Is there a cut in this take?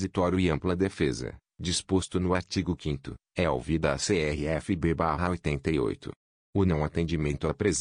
no; 0 cuts

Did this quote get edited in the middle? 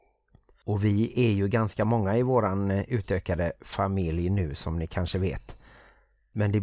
no; 0 cuts

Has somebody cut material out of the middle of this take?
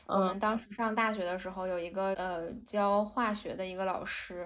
yes; 1 cut; at 2.1 s

